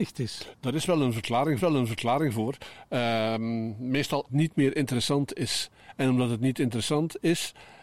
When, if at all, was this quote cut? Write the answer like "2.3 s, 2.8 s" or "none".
1.6 s, 4.3 s